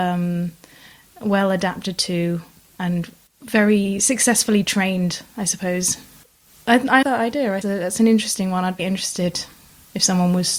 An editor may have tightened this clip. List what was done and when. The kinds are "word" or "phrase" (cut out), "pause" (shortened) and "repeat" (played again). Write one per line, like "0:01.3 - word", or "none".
0:07.0 - word
0:07.6 - phrase
0:08.8 - word